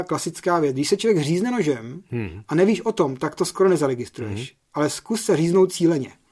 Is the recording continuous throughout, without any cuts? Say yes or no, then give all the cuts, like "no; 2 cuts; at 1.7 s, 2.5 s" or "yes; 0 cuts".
yes; 0 cuts